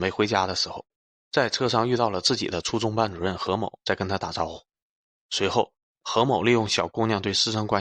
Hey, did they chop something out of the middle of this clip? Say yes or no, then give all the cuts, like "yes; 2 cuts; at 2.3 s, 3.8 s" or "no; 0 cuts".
no; 0 cuts